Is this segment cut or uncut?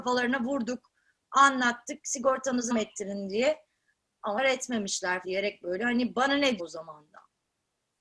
cut